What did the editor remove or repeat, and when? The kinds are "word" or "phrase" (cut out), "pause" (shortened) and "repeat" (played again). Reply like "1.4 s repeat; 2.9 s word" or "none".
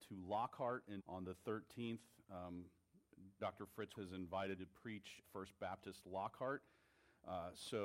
1.0 s word; 3.4 s word; 3.9 s word; 4.6 s word; 5.2 s word